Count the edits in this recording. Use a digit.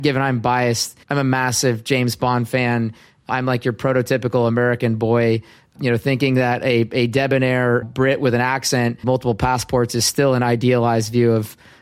3